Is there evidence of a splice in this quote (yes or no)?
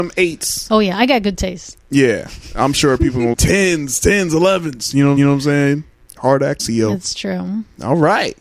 yes